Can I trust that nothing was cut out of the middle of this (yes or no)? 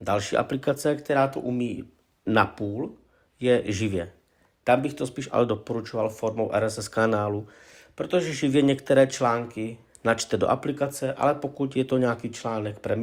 yes